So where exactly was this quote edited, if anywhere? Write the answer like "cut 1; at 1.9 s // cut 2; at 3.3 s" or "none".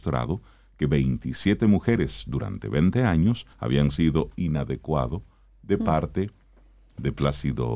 cut 1; at 3.5 s // cut 2; at 4.3 s